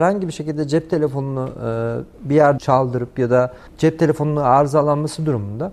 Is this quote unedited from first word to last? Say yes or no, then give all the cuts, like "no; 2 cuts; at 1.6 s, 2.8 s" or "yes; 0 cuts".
no; 2 cuts; at 2.6 s, 3.7 s